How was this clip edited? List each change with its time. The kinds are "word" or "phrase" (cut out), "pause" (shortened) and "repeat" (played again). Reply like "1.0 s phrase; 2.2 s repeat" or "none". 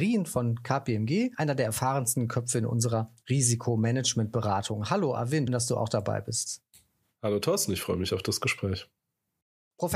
5.5 s word